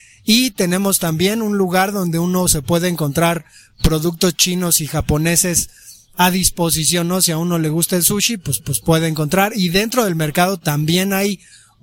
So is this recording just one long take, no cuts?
no; 1 cut; at 8.6 s

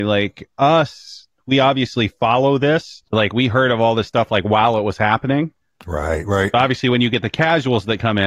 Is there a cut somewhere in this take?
yes; 1 cut; at 3.1 s

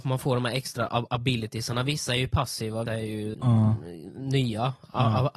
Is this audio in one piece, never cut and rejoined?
no; 2 cuts; at 2.9 s, 3.3 s

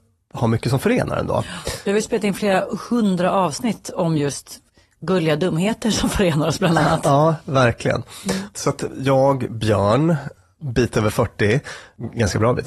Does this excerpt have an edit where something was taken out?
no; 0 cuts

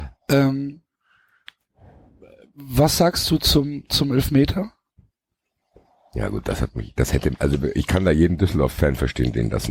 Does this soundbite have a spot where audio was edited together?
no; 0 cuts

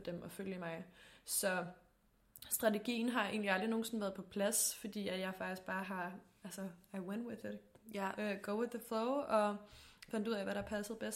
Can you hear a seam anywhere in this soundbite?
no; 0 cuts

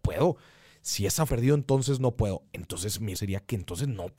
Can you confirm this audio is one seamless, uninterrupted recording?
no; 2 cuts; at 1.3 s, 3.1 s

